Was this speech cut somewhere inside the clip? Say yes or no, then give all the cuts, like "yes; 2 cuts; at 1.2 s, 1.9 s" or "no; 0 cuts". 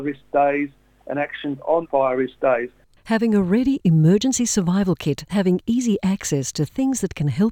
yes; 2 cuts; at 1.8 s, 5.3 s